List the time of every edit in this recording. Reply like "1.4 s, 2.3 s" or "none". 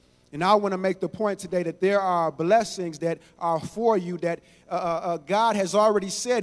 none